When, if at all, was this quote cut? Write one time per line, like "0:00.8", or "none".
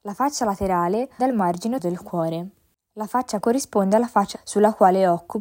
0:01.2
0:01.8
0:03.4
0:04.3